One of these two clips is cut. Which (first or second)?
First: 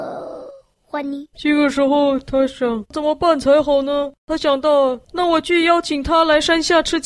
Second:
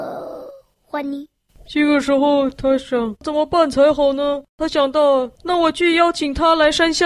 first